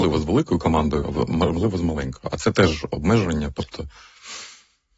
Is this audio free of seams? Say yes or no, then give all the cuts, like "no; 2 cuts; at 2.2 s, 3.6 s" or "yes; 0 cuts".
yes; 0 cuts